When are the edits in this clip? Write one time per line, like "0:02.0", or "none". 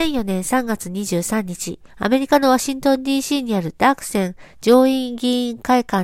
0:01.9